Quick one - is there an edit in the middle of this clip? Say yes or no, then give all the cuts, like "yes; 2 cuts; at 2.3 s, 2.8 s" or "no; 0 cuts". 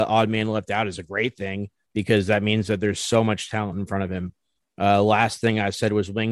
no; 0 cuts